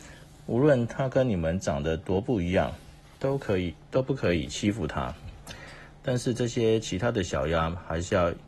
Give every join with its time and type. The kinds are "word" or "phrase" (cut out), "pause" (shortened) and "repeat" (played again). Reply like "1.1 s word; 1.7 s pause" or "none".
none